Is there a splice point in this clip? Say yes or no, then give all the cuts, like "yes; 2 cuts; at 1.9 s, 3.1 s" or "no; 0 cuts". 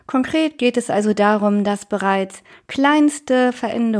no; 0 cuts